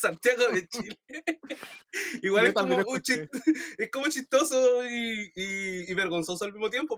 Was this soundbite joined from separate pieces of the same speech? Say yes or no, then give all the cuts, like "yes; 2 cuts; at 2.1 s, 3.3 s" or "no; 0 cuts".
no; 0 cuts